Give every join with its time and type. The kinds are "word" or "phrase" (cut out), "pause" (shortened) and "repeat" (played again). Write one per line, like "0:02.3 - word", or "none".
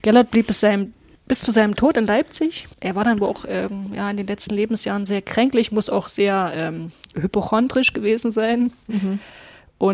0:02.7 - pause